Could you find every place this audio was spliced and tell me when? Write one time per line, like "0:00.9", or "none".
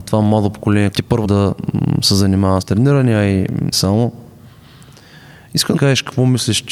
0:00.9
0:01.2
0:02.6
0:03.7
0:05.8